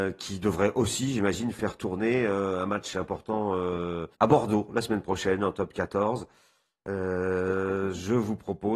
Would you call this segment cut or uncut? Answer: cut